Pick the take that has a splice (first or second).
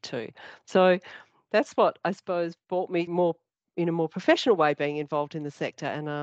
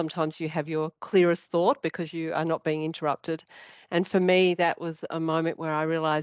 first